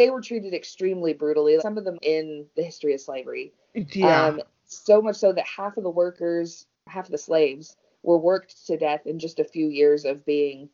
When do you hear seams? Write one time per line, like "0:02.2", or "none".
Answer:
0:01.6
0:01.9